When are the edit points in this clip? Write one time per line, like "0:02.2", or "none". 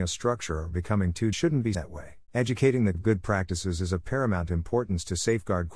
0:01.3
0:01.7
0:02.3
0:02.9